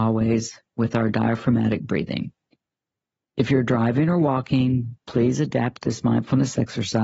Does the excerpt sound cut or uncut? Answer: uncut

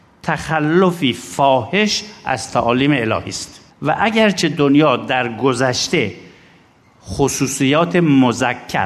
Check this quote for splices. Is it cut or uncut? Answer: cut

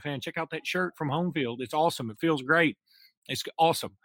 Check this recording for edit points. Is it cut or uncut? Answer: uncut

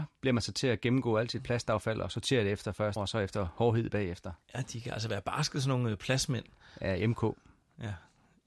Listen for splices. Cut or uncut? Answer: cut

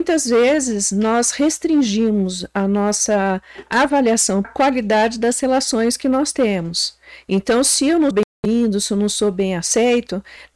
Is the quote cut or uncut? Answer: cut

